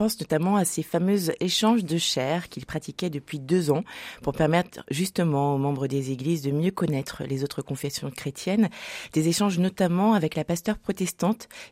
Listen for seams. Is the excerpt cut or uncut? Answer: uncut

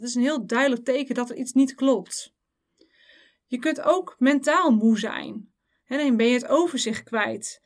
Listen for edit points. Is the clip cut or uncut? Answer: uncut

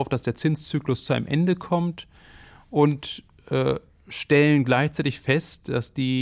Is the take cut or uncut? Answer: uncut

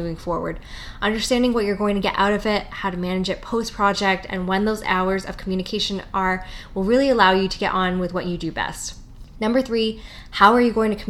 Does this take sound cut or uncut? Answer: uncut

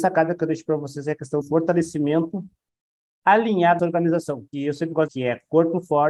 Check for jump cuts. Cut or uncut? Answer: cut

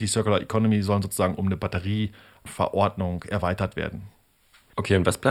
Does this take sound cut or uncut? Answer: uncut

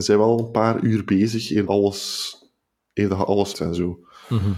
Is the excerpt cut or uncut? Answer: cut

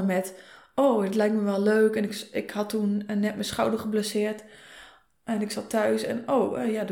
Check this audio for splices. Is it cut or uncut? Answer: uncut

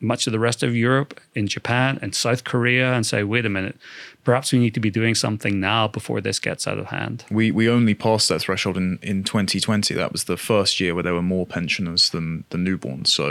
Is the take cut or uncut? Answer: uncut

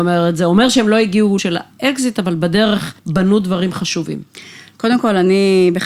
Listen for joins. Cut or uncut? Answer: cut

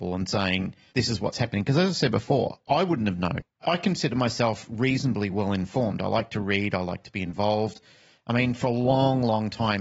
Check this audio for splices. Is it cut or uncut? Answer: uncut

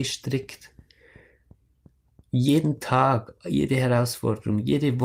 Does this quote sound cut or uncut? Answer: uncut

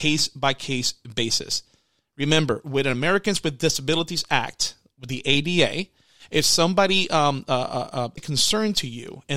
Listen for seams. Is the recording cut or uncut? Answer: cut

